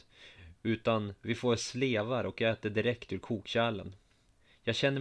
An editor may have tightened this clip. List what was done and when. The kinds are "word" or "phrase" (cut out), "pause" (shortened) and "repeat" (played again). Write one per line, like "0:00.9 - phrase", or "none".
none